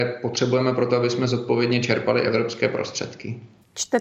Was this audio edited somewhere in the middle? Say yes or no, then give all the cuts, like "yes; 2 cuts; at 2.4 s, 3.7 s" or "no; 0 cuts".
no; 0 cuts